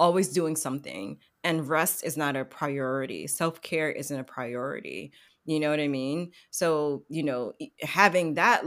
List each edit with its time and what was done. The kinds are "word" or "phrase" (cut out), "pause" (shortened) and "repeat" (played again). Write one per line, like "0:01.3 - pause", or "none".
none